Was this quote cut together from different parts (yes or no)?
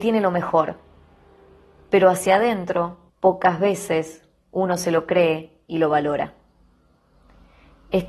yes